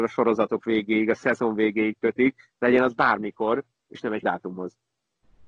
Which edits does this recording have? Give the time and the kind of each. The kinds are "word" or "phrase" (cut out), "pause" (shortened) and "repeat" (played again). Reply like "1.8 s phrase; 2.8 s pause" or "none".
4.2 s word